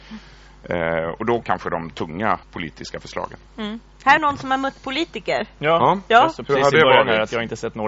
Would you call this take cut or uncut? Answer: cut